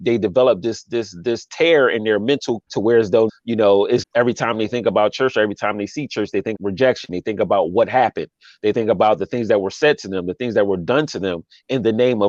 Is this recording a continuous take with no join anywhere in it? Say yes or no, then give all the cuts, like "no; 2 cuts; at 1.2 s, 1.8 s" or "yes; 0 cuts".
no; 4 cuts; at 2.7 s, 3.3 s, 4.0 s, 6.5 s